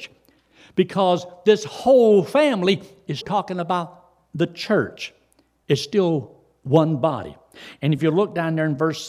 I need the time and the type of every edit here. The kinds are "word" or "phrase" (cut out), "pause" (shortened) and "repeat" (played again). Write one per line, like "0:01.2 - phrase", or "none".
0:03.2 - word